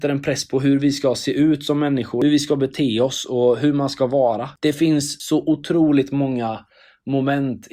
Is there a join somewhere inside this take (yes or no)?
no